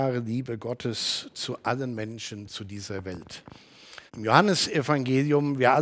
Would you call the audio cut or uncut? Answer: cut